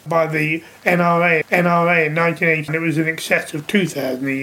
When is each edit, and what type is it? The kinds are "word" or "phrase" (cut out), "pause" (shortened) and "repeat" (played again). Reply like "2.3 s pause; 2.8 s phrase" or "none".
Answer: 1.4 s repeat; 2.7 s word